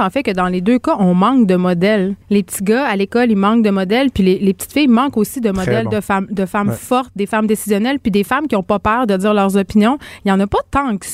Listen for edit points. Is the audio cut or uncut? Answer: cut